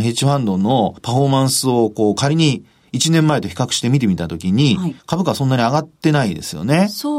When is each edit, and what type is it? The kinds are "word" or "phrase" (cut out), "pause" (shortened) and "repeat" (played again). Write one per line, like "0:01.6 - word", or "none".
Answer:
0:01.0 - pause
0:05.0 - pause

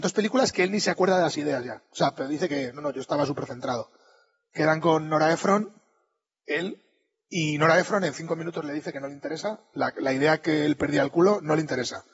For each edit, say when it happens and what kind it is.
none

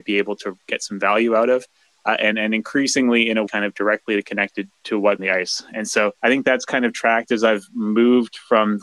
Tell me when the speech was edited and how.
0:03.5 - phrase
0:05.2 - phrase
0:06.2 - pause

